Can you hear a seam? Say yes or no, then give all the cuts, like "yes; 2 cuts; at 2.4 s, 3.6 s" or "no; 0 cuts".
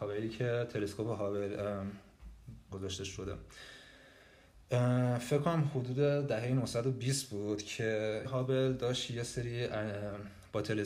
yes; 2 cuts; at 2.7 s, 8.2 s